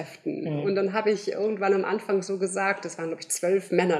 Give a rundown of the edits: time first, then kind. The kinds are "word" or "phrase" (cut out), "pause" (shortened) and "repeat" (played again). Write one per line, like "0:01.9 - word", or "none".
none

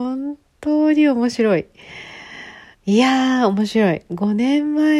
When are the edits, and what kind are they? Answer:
0:02.7 - pause

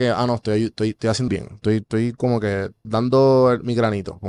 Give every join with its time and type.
0:01.3 - word
0:02.8 - word

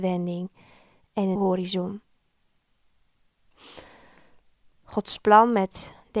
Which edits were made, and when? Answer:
0:01.4 - word

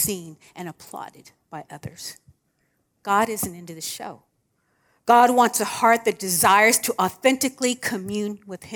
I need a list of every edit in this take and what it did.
none

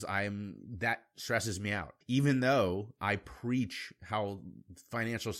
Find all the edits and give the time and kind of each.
0:02.0 - pause

